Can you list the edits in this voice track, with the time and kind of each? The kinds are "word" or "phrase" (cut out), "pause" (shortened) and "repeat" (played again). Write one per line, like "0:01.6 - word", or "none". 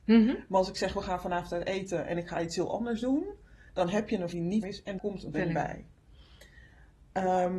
0:04.3 - word
0:04.6 - word
0:05.0 - word
0:05.3 - word